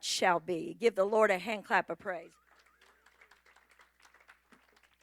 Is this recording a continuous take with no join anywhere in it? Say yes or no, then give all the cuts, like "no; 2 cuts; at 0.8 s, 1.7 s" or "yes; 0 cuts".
yes; 0 cuts